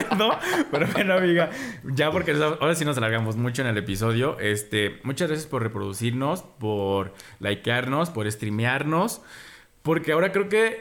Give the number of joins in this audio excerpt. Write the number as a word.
zero